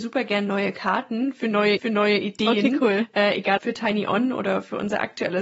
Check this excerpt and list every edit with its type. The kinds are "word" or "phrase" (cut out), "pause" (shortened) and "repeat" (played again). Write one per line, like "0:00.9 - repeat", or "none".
0:01.8 - repeat
0:03.6 - word